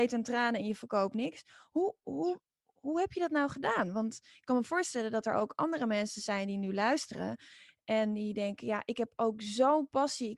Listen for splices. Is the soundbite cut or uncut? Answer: uncut